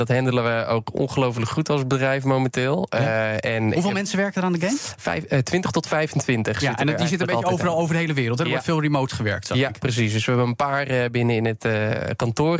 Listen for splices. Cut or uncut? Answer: uncut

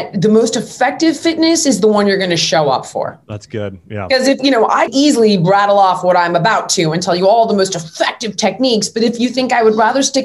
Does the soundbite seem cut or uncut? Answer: cut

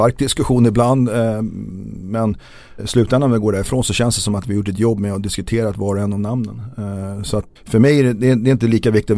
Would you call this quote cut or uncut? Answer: cut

